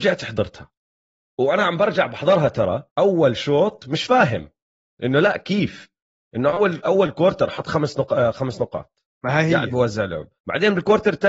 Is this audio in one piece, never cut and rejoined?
no; 2 cuts; at 2.9 s, 10.4 s

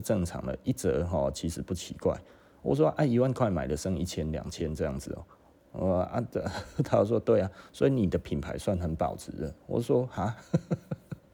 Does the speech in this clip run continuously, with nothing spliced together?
yes; 0 cuts

